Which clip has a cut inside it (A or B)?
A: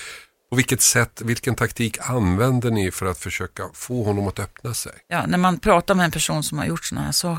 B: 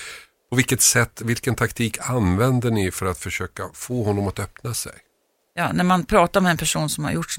A